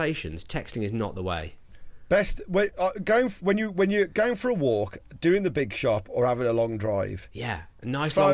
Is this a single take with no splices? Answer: yes; 0 cuts

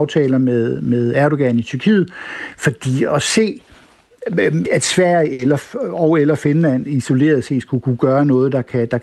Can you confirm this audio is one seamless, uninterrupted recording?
no; 1 cut; at 4.6 s

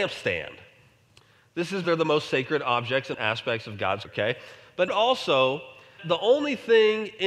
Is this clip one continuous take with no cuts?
no; 5 cuts; at 1.8 s, 3.1 s, 4.0 s, 4.9 s, 6.0 s

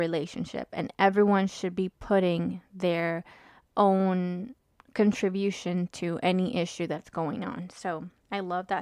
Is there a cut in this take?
no; 0 cuts

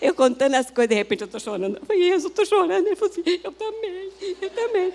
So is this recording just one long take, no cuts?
yes; 0 cuts

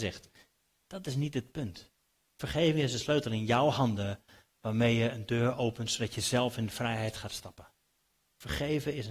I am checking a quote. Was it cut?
no; 0 cuts

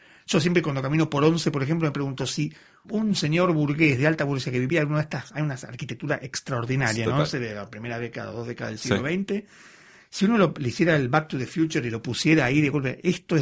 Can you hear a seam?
yes; 1 cut; at 2.8 s

